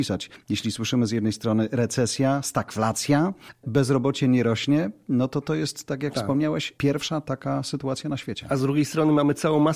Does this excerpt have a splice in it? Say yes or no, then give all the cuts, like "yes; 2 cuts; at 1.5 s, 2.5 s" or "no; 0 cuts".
yes; 1 cut; at 3.6 s